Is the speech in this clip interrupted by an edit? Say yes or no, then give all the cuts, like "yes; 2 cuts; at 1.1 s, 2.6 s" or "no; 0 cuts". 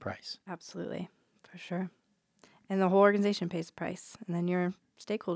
no; 0 cuts